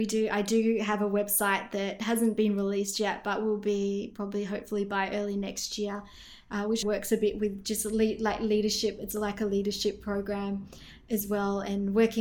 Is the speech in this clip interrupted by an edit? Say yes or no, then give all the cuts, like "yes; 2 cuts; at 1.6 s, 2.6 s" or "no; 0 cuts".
yes; 1 cut; at 6.8 s